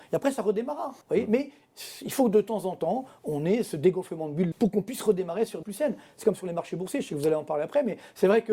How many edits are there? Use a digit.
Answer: 3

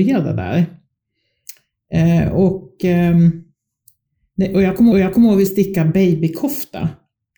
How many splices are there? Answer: 2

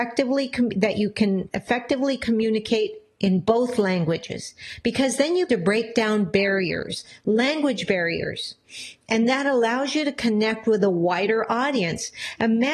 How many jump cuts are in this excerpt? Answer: 1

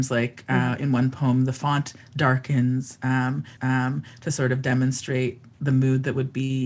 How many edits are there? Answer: 1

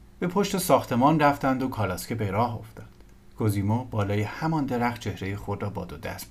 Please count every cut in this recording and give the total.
0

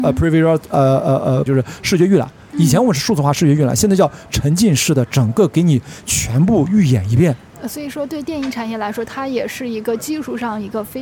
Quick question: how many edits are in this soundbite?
1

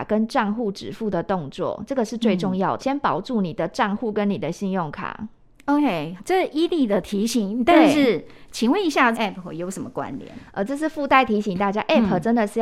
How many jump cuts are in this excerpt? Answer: 3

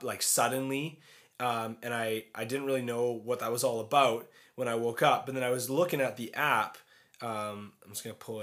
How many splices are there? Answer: 0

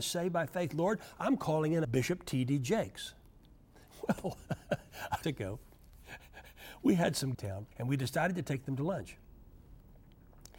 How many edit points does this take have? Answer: 4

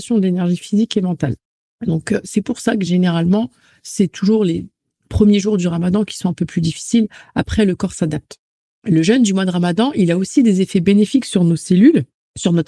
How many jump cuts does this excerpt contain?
0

